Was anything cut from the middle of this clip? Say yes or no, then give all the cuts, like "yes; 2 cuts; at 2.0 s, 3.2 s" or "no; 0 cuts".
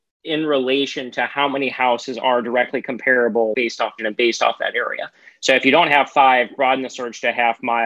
yes; 2 cuts; at 3.5 s, 4.0 s